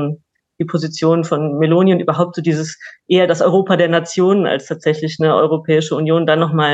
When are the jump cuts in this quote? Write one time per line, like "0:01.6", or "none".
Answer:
none